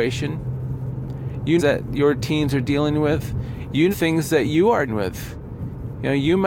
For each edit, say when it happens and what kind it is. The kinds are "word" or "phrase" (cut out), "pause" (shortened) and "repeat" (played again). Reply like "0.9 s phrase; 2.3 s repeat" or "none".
1.6 s phrase; 3.9 s phrase; 4.9 s word